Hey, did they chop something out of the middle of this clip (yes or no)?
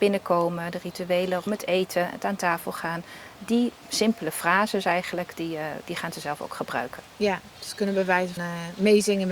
yes